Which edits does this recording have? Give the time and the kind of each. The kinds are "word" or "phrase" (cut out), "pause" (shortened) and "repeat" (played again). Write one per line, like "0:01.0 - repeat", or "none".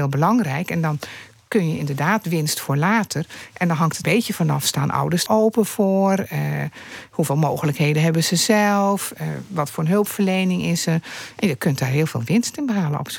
0:04.0 - word
0:05.3 - word